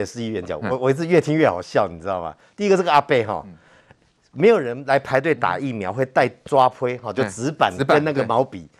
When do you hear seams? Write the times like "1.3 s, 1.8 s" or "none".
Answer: none